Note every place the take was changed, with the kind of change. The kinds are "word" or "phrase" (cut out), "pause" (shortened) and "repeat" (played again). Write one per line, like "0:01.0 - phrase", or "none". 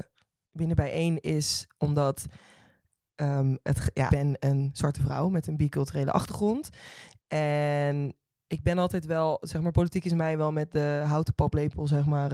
0:04.1 - phrase